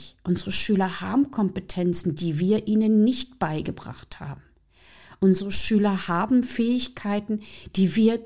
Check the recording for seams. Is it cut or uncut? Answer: uncut